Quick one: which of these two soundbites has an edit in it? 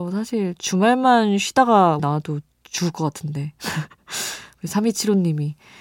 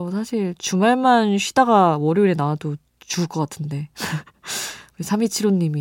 first; 1 cut; at 2.0 s

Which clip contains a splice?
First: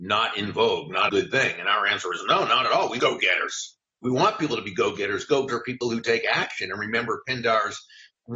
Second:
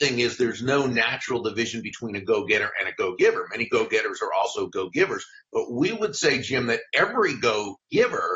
first; 3 cuts; at 1.1 s, 3.0 s, 5.5 s

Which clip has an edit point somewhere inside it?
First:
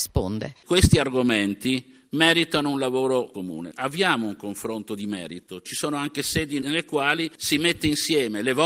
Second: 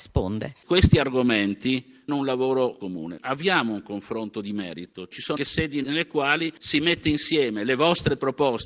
second; 2 cuts; at 2.1 s, 5.4 s

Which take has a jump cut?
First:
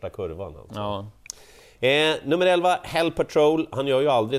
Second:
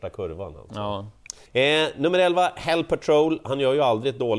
second; 1 cut; at 1.5 s

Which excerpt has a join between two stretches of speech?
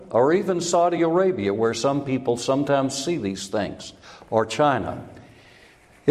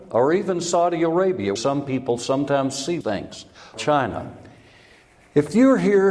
second; 3 cuts; at 1.6 s, 3.0 s, 3.8 s

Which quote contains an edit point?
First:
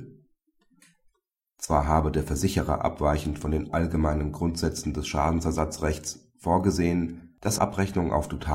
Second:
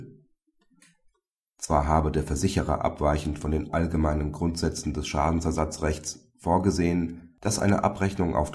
first; 1 cut; at 7.6 s

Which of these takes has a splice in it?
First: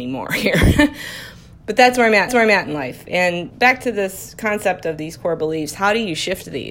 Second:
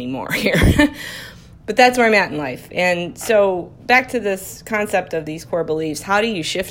first; 2 cuts; at 2.3 s, 3.5 s

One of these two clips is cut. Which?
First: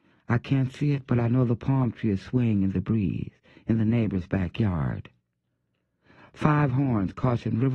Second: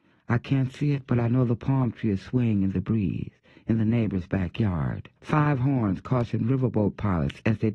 second; 1 cut; at 5.2 s

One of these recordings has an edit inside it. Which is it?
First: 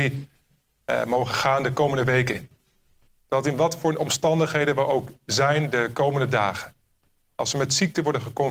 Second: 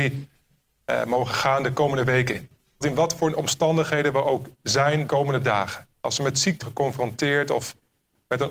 second; 4 cuts; at 2.8 s, 5.1 s, 5.9 s, 6.6 s

